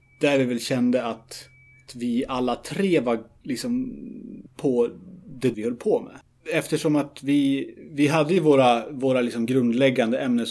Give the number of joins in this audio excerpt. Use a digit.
2